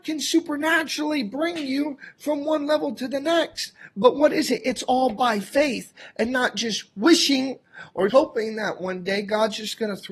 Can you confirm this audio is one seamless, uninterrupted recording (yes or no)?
no